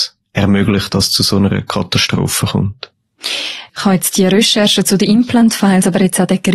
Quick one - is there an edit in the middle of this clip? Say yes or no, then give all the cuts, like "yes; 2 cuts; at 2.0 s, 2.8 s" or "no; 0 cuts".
yes; 1 cut; at 3.7 s